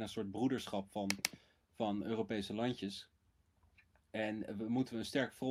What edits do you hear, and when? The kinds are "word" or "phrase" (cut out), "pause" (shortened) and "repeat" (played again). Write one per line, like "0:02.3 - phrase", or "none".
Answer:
none